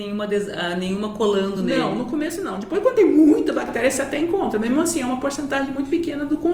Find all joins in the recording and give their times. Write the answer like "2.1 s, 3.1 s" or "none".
none